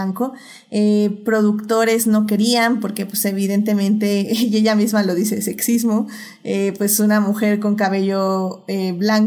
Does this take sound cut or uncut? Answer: uncut